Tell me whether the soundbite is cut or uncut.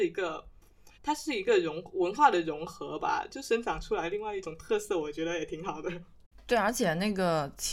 cut